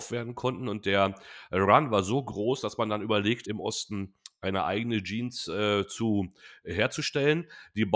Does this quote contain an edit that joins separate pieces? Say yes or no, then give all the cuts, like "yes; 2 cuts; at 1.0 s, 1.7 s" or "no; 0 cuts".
yes; 1 cut; at 3.4 s